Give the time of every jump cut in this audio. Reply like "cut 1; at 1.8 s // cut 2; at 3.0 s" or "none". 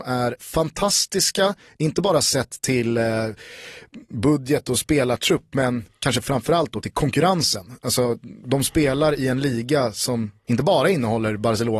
none